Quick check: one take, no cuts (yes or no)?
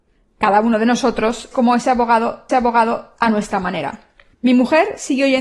no